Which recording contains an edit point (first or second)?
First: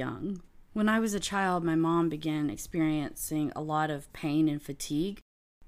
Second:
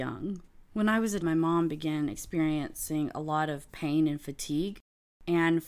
second